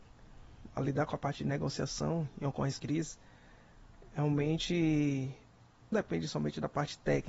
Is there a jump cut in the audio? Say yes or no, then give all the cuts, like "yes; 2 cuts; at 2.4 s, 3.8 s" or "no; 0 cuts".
yes; 2 cuts; at 2.8 s, 5.9 s